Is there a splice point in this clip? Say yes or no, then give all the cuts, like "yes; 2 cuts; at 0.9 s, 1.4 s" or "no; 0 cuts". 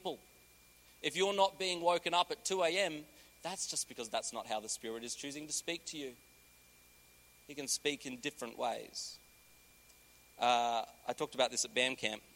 no; 0 cuts